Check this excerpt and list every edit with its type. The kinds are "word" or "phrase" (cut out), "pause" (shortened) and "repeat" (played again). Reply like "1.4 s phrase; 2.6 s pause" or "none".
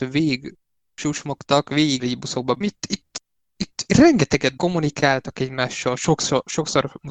2.0 s word; 2.6 s phrase; 3.9 s word; 4.6 s word